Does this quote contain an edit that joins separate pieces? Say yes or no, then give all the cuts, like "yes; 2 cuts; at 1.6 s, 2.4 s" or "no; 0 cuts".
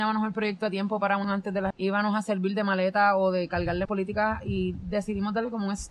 yes; 3 cuts; at 1.2 s, 1.7 s, 3.8 s